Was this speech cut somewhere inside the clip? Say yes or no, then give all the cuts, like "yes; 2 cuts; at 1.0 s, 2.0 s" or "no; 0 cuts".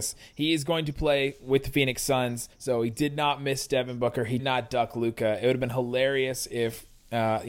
yes; 2 cuts; at 2.5 s, 4.4 s